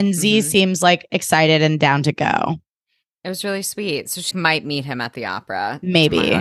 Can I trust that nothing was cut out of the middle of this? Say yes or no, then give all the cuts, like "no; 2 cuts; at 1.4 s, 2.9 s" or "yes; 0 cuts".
no; 1 cut; at 4.3 s